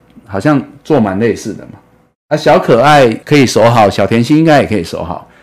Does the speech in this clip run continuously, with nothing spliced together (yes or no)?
no